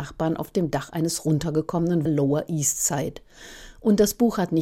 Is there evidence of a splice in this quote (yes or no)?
yes